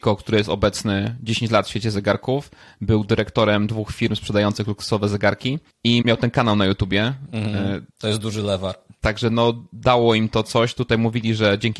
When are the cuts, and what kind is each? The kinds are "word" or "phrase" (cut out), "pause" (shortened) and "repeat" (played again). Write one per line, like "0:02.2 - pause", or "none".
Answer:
0:06.0 - word
0:07.9 - pause

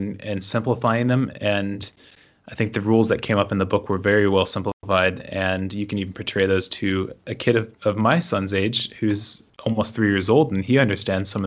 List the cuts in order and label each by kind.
none

